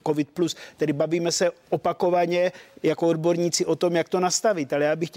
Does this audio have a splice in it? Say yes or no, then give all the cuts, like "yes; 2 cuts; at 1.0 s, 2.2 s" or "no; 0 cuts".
no; 0 cuts